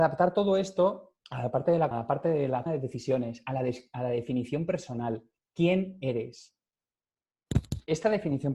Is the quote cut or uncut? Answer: cut